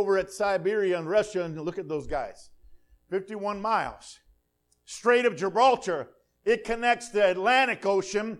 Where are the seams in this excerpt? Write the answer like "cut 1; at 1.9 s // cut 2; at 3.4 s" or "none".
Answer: none